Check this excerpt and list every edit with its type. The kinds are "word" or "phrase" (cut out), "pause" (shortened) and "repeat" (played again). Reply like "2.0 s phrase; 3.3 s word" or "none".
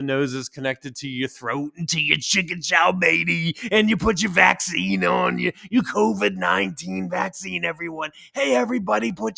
none